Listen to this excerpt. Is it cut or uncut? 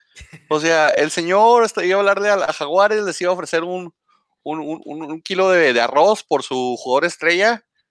uncut